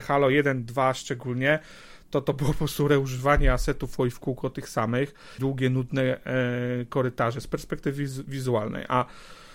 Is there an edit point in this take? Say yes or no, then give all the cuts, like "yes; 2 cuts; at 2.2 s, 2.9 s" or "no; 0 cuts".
yes; 2 cuts; at 4.0 s, 5.4 s